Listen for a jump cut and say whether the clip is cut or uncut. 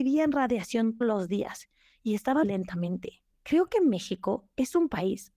cut